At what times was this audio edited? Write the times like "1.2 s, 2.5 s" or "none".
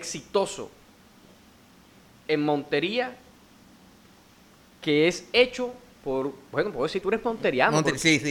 7.0 s